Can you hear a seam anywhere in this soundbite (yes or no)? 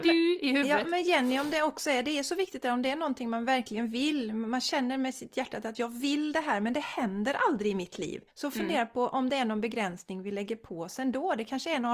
yes